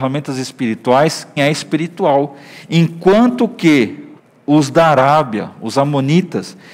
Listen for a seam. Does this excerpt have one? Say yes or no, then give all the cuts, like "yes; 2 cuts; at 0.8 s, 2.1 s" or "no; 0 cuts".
yes; 2 cuts; at 1.4 s, 4.2 s